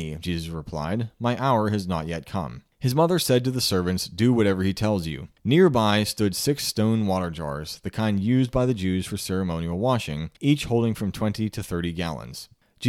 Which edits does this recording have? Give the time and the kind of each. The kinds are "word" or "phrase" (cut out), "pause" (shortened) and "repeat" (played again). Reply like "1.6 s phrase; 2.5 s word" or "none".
2.7 s pause; 5.4 s pause; 10.4 s pause